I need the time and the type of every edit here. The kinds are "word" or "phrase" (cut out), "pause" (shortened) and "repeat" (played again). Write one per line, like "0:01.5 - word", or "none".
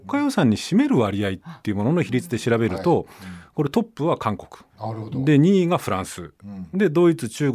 0:04.7 - pause